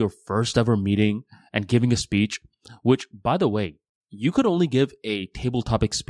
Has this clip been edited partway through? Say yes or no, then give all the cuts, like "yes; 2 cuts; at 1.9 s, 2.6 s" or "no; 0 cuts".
no; 0 cuts